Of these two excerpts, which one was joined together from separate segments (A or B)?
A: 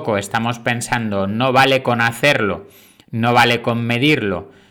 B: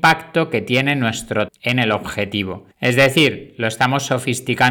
B